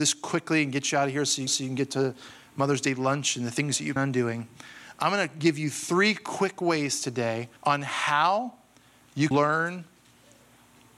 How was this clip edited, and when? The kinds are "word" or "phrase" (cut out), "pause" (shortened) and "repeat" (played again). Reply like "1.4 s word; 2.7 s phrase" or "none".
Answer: 1.5 s repeat; 4.0 s word; 7.6 s pause; 9.3 s word